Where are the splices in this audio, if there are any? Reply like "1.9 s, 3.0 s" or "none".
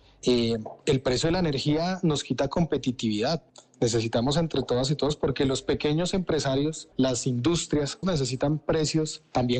6.9 s, 8.0 s